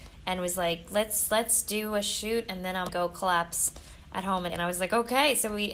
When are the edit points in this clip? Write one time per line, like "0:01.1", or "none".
0:02.9
0:04.5